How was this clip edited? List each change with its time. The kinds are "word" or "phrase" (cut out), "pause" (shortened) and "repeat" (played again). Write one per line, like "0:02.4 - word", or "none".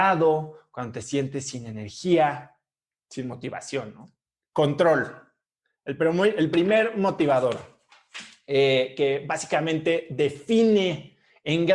none